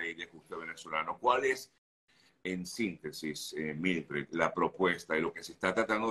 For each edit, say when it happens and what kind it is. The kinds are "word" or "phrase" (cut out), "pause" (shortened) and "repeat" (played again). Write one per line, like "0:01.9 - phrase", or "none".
none